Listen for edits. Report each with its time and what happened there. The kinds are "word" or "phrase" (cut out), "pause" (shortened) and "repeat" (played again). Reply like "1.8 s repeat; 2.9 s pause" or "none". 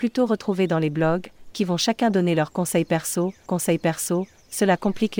1.5 s word; 3.5 s repeat

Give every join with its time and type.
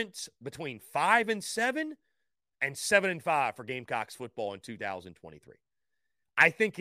none

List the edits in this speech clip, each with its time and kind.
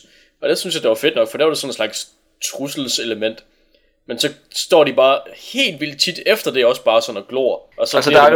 none

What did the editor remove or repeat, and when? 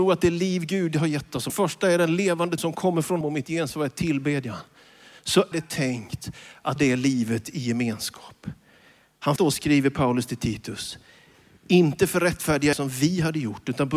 1.5 s word; 2.6 s word; 3.2 s word; 5.5 s word; 6.8 s word; 9.4 s word; 12.7 s word

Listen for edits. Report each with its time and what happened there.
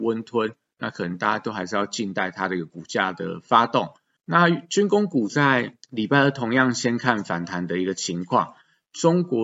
4.2 s pause; 5.8 s pause

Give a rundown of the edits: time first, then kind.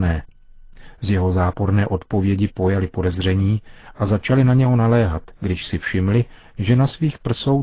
5.3 s pause

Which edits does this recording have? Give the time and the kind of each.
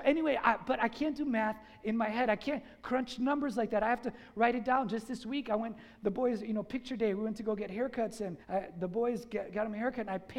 8.4 s pause

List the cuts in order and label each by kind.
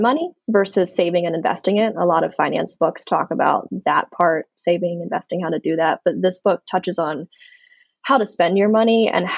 none

